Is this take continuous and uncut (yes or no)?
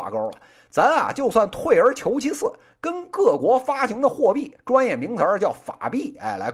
yes